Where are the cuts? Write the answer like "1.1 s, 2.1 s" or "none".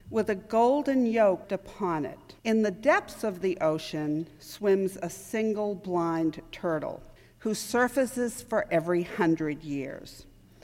1.4 s, 2.4 s, 7.2 s, 8.7 s